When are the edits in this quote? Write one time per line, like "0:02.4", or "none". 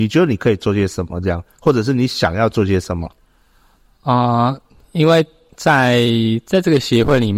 none